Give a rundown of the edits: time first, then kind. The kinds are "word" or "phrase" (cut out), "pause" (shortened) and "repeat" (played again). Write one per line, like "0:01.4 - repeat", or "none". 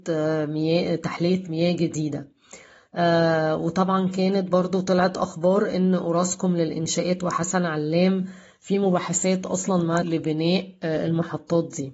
0:10.0 - word